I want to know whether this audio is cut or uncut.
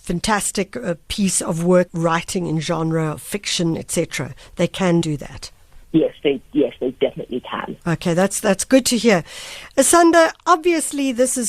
cut